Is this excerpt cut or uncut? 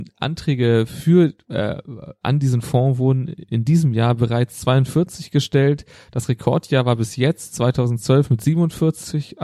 uncut